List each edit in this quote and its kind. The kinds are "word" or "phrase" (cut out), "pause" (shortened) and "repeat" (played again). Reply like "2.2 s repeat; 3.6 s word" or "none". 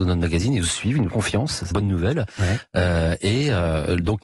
1.1 s word; 1.7 s phrase